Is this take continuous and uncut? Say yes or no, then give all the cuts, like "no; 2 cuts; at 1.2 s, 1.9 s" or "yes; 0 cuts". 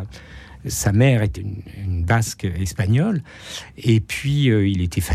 no; 1 cut; at 1.3 s